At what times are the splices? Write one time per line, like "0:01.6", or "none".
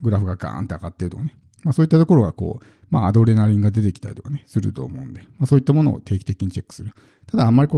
none